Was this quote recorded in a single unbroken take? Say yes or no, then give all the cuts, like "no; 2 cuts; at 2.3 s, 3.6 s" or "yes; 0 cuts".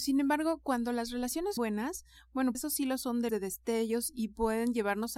no; 3 cuts; at 1.6 s, 2.5 s, 3.3 s